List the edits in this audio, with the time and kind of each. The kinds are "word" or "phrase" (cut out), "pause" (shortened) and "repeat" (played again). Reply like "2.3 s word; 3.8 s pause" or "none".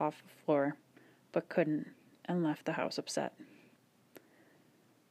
none